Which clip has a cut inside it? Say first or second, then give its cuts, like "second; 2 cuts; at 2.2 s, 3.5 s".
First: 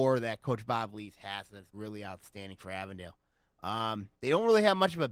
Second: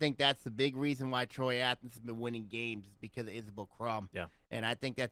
first; 1 cut; at 1.7 s